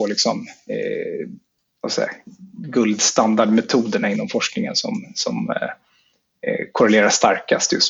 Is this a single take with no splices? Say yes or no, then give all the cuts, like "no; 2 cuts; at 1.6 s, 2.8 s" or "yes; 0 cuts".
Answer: no; 1 cut; at 1.6 s